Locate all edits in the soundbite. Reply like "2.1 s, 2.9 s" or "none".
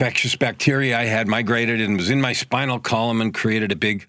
none

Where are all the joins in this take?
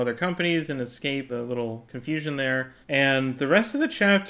1.3 s, 2.8 s

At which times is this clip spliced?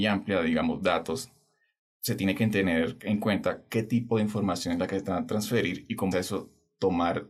6.1 s

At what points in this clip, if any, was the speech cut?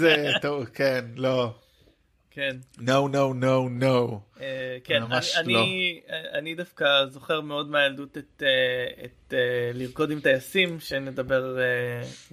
none

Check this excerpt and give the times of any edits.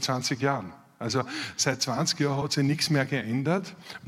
none

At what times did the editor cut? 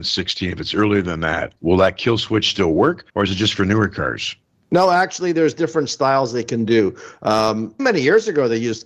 1.6 s, 3.1 s, 7.8 s

